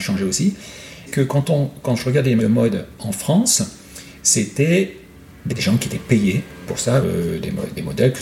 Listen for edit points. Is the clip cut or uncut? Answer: cut